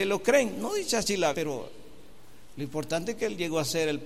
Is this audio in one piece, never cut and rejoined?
no; 1 cut; at 1.3 s

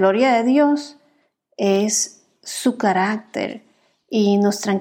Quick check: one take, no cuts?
yes; 0 cuts

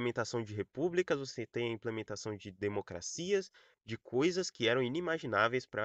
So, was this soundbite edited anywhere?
no; 0 cuts

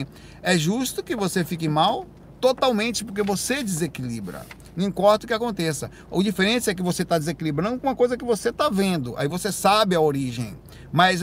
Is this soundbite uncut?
yes; 0 cuts

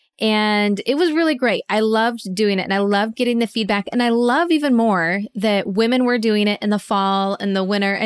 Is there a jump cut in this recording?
no; 0 cuts

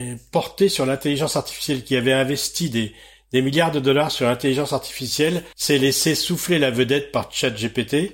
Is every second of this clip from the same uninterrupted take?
no; 1 cut; at 5.5 s

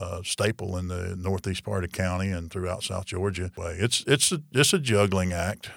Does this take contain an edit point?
yes; 1 cut; at 3.5 s

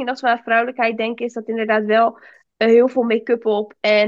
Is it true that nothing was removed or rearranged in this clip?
yes; 0 cuts

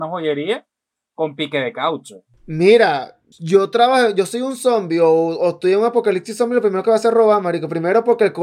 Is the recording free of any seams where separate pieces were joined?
no; 1 cut; at 3.3 s

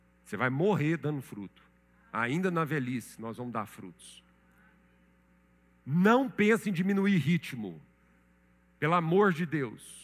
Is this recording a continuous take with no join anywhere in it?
yes; 0 cuts

